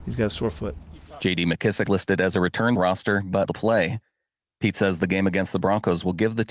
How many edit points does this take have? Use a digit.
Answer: 3